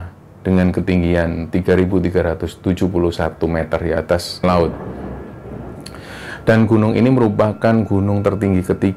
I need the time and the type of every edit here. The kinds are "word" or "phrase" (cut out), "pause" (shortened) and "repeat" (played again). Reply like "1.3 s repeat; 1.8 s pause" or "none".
4.4 s word